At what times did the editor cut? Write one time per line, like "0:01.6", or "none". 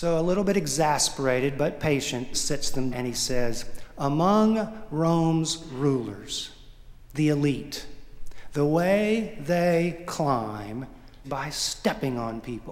0:02.3
0:02.9
0:11.2